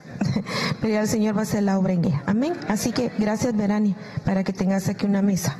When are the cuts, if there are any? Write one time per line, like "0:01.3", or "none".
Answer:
none